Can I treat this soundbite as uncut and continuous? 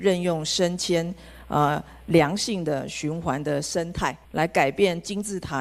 no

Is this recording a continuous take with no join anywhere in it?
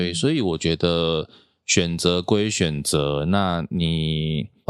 yes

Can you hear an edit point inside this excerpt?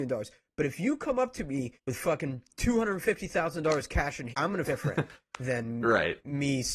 yes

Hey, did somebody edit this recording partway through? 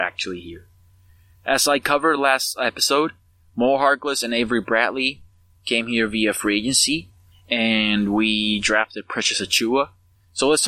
no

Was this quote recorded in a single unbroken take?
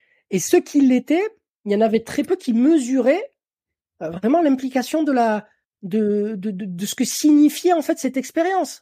yes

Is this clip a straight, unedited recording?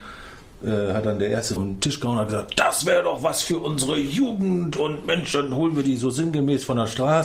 no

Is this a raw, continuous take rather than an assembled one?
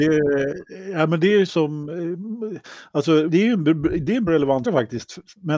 no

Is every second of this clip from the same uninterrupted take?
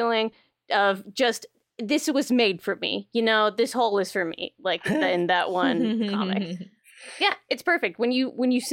yes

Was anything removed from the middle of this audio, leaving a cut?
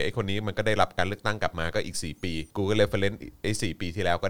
yes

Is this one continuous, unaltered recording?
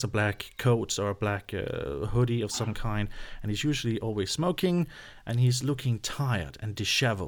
yes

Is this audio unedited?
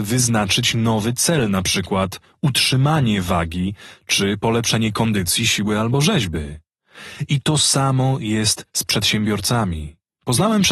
yes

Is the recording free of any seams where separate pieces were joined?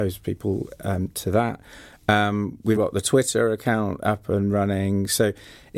no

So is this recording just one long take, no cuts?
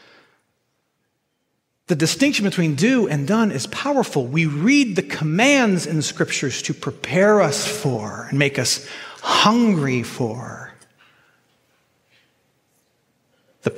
yes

